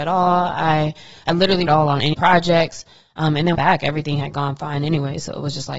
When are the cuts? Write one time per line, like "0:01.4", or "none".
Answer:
0:01.7
0:02.1
0:03.5

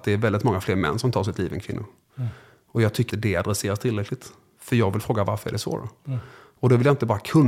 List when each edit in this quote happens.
0:03.1

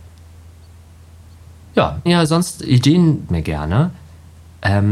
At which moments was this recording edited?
0:02.1
0:03.3

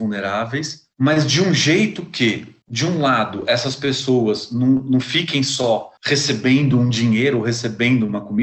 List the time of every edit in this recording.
none

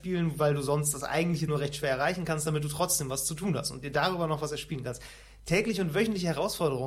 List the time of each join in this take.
0:01.5

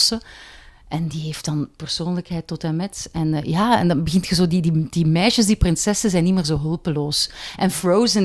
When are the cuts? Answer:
none

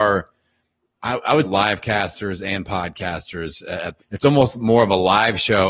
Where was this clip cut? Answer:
0:01.4
0:04.0

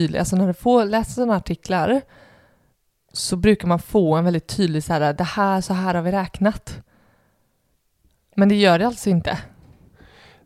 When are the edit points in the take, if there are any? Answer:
none

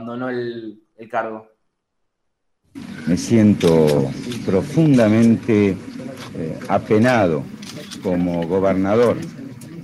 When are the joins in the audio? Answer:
none

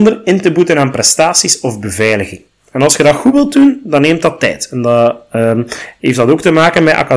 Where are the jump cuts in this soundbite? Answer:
none

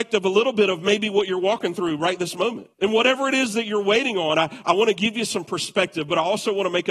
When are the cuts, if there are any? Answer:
0:02.7

